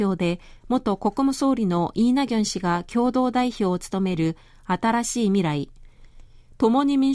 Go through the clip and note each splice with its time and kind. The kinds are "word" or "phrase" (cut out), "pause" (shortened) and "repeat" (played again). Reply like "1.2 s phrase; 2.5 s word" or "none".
none